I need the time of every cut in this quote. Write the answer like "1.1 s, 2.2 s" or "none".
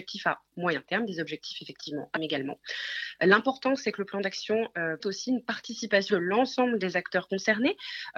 2.2 s, 5.0 s, 6.1 s